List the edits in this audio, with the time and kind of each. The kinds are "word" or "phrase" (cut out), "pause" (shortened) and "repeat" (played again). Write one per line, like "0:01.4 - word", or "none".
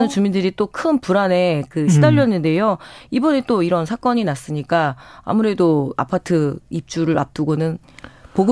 none

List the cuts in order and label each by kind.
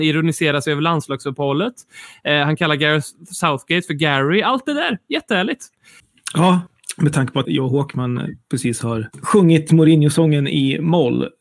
0:07.4 - word

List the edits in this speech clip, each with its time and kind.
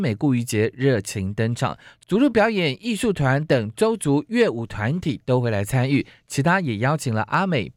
none

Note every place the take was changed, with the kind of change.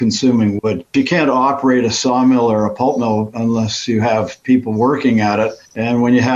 none

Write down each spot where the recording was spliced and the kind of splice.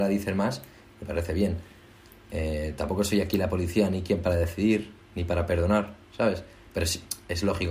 none

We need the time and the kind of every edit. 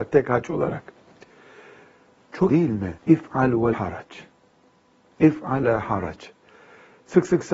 0:02.5 - word
0:03.0 - pause
0:03.7 - word
0:05.6 - word

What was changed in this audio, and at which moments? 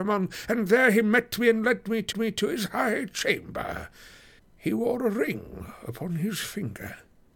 0:02.1 - repeat
0:04.4 - pause

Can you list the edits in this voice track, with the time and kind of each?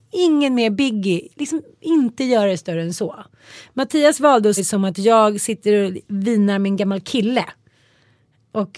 0:04.6 - word
0:06.0 - pause

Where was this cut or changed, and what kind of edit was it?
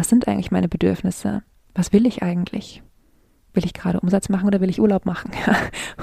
none

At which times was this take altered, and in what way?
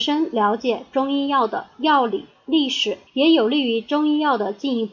0:03.1 - pause

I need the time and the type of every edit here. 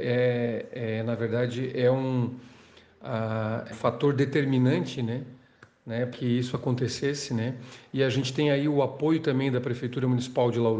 0:03.7 - word
0:06.1 - word

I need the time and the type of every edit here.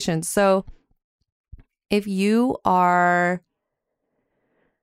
none

